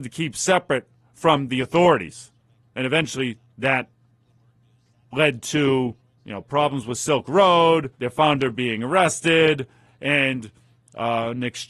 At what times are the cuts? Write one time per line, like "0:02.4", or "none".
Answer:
0:06.0
0:07.9